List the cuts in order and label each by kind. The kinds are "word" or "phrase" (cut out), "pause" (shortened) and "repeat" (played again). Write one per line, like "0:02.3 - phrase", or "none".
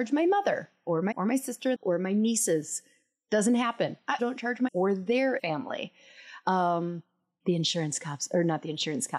0:01.1 - word
0:01.7 - word
0:04.2 - word
0:04.7 - word
0:05.4 - word
0:07.4 - word